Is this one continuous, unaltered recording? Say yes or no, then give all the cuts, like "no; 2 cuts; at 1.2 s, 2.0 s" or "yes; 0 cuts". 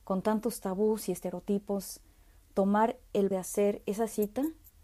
no; 1 cut; at 3.3 s